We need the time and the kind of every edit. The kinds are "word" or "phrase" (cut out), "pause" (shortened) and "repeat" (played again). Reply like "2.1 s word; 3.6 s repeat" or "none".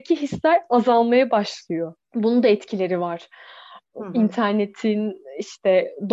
2.0 s pause